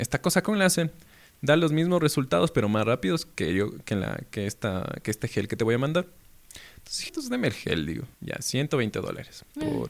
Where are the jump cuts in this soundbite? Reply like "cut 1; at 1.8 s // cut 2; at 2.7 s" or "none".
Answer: cut 1; at 7.1 s // cut 2; at 8.1 s